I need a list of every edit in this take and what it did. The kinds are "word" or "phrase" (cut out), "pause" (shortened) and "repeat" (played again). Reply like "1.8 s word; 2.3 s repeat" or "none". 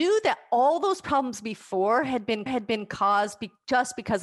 2.5 s repeat